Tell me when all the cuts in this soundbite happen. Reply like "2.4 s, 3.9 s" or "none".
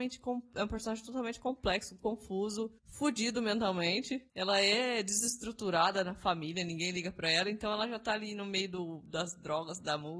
2.8 s, 4.3 s